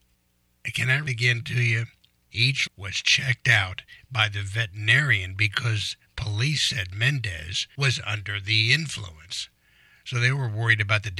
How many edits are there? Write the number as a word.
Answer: two